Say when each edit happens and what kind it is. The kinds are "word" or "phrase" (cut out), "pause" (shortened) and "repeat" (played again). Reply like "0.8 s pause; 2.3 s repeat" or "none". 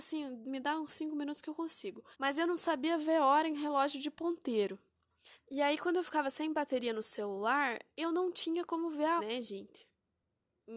2.1 s pause; 5.3 s pause; 9.2 s word